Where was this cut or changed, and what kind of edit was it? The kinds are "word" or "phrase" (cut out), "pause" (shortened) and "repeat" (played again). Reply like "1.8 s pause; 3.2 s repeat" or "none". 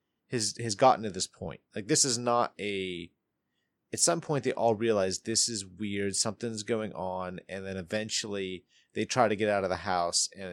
none